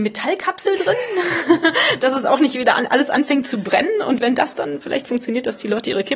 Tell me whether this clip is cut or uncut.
uncut